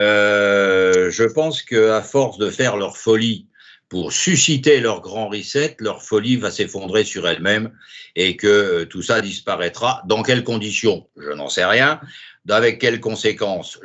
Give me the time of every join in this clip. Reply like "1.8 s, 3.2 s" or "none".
none